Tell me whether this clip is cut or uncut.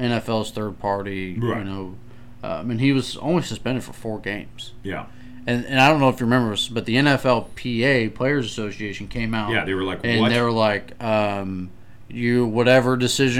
uncut